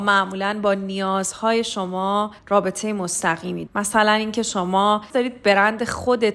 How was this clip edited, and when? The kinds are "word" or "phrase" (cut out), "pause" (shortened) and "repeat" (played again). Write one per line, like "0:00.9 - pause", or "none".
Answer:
0:03.7 - word
0:05.1 - word